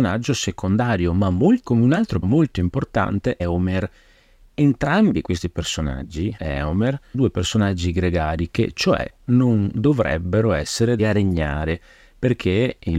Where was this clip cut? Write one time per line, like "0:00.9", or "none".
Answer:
0:01.6
0:02.2
0:03.4
0:06.4
0:07.1
0:08.5
0:11.0